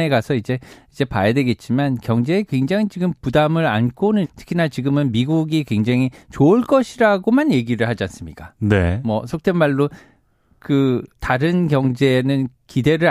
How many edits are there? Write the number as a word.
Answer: two